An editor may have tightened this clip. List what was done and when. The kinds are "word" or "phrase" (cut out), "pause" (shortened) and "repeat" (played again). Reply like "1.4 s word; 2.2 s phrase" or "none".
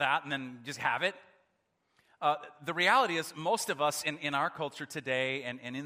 none